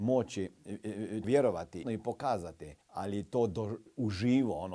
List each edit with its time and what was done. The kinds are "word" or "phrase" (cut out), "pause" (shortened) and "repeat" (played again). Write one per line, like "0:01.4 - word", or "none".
0:01.2 - word
0:01.8 - phrase
0:02.8 - pause